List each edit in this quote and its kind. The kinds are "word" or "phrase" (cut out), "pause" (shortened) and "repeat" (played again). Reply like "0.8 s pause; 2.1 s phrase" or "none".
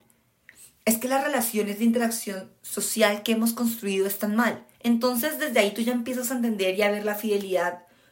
4.7 s pause